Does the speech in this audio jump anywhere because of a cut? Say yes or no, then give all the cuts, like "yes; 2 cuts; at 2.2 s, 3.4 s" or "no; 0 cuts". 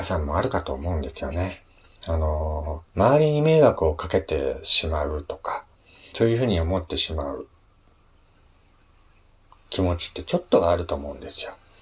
yes; 1 cut; at 2.9 s